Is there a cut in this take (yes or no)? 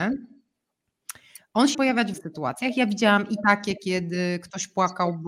yes